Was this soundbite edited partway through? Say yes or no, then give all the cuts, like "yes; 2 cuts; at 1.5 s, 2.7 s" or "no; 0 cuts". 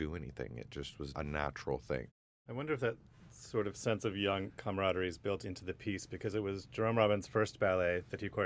no; 0 cuts